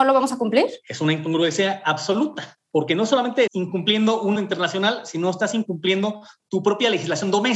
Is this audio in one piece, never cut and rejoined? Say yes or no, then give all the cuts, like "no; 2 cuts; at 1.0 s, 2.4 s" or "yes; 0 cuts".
no; 3 cuts; at 2.6 s, 3.5 s, 4.4 s